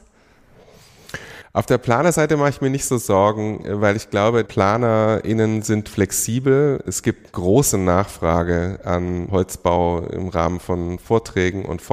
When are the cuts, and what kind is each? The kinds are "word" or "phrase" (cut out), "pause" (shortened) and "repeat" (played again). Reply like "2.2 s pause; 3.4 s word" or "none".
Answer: 4.5 s word; 7.3 s word